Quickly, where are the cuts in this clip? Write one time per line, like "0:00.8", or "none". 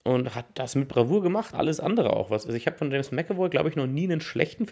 0:01.5